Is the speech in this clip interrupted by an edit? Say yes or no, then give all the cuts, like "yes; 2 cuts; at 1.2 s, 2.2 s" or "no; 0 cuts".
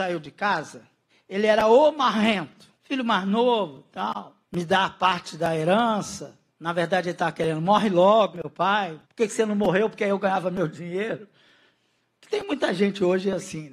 yes; 6 cuts; at 1.1 s, 2.8 s, 4.4 s, 6.5 s, 8.3 s, 9.0 s